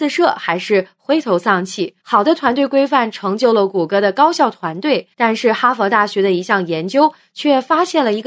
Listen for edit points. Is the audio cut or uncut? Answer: cut